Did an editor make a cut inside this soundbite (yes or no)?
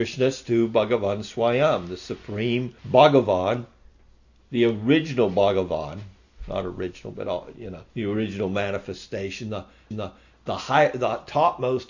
yes